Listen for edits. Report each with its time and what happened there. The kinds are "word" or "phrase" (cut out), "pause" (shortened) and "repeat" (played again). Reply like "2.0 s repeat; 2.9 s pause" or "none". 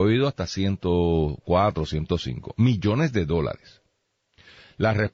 none